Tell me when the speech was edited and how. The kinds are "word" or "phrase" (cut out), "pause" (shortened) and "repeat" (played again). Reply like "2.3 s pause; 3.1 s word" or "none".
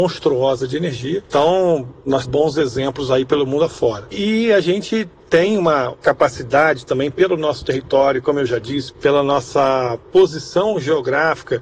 2.2 s phrase